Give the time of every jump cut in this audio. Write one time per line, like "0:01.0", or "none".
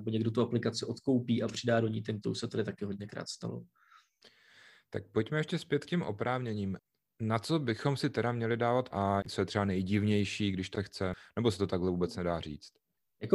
0:02.2
0:08.9
0:10.7